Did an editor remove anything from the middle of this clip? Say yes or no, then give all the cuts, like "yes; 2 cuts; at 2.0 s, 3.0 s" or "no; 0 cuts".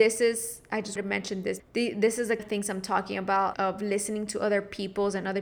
yes; 4 cuts; at 1.0 s, 1.6 s, 2.4 s, 3.5 s